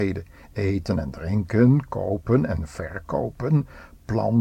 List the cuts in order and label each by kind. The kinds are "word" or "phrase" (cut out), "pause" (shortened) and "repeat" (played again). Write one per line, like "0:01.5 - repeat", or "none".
none